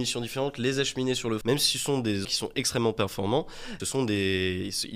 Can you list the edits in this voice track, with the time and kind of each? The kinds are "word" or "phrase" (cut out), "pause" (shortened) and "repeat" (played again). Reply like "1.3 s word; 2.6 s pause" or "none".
1.4 s word; 2.2 s word; 3.8 s word